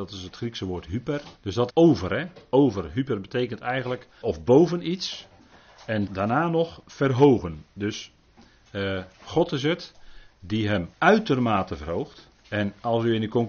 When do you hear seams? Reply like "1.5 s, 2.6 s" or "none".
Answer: 1.4 s, 1.7 s, 4.2 s, 6.1 s, 9.1 s, 10.9 s, 12.4 s